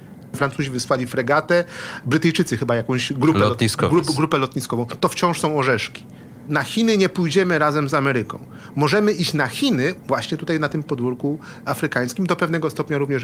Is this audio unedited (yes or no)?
yes